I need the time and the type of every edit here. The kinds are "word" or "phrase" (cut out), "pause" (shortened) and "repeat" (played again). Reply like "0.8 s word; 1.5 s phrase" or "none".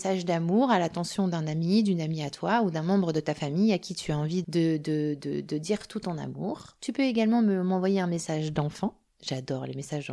4.4 s word; 9.1 s pause